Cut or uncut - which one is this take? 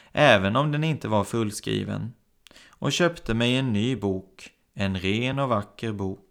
uncut